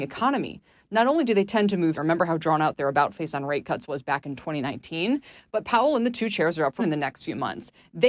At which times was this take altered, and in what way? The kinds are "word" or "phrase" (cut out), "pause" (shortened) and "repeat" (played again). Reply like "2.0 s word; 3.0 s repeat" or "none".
1.9 s word; 6.8 s word